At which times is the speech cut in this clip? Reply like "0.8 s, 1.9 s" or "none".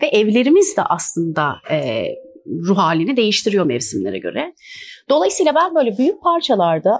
none